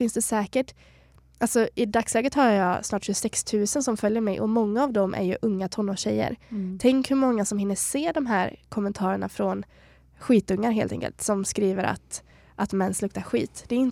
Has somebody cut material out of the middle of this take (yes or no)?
no